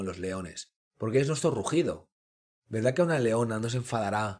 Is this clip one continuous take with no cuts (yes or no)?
yes